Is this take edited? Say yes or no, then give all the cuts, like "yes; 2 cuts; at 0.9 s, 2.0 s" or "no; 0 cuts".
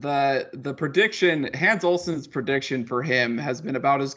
no; 0 cuts